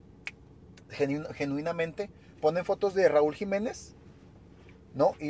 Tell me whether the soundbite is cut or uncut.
uncut